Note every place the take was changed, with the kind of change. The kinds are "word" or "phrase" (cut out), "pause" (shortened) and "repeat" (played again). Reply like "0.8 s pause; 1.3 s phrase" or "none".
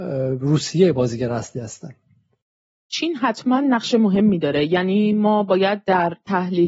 none